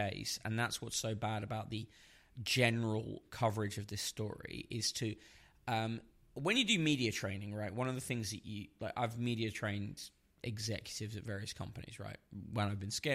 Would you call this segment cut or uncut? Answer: uncut